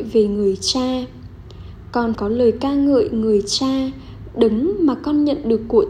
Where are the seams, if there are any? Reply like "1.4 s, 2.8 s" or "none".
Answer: 2.1 s